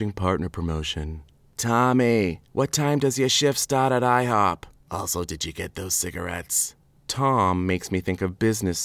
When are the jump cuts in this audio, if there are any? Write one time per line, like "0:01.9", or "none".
none